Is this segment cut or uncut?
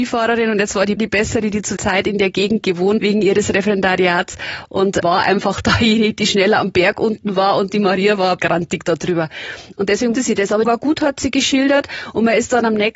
cut